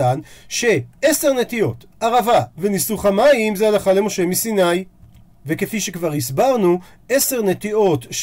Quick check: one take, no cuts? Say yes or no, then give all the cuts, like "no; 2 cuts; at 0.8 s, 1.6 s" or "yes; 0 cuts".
yes; 0 cuts